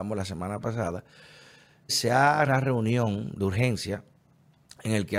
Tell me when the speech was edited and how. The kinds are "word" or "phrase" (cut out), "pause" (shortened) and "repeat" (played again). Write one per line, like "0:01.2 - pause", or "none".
0:01.9 - word
0:02.5 - word